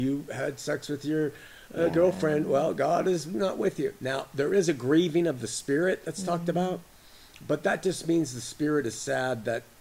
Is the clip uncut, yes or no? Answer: yes